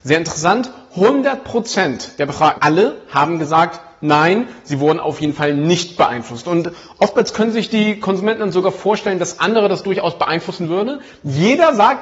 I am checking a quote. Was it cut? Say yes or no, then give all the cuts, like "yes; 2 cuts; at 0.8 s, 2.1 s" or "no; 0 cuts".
yes; 1 cut; at 2.6 s